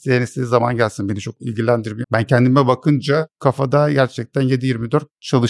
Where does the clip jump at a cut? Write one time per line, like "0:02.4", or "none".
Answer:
0:02.0